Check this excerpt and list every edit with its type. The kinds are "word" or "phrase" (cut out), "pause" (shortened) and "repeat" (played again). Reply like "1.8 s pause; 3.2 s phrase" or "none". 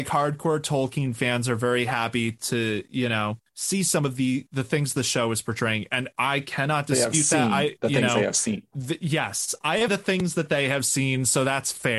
9.9 s phrase